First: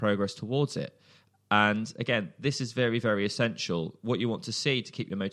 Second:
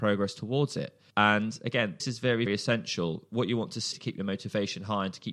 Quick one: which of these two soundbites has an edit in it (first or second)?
second